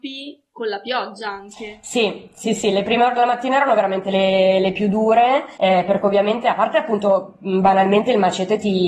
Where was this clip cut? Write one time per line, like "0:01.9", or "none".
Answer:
0:05.5